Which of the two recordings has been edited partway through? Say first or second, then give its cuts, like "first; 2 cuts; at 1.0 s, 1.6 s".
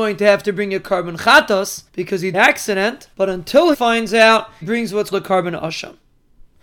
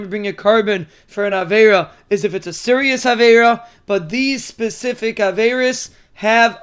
first; 6 cuts; at 1.9 s, 2.3 s, 3.1 s, 3.7 s, 4.6 s, 5.1 s